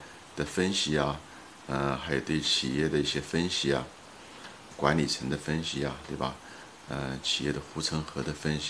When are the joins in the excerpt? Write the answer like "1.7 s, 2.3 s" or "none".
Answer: 4.7 s